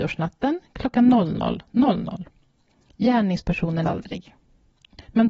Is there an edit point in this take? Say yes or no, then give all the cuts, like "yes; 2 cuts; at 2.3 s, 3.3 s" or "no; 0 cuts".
yes; 1 cut; at 3.8 s